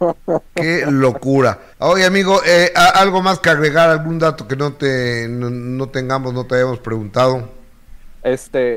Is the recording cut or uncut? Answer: cut